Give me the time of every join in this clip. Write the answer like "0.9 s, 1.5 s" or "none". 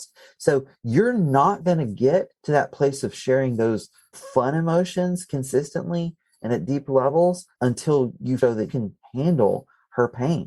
2.4 s, 4.1 s, 7.5 s, 8.4 s, 8.7 s